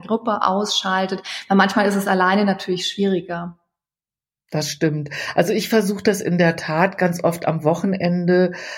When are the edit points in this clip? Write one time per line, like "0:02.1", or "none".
none